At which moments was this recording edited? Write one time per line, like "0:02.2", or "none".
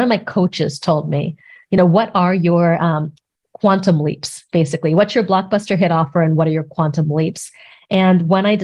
none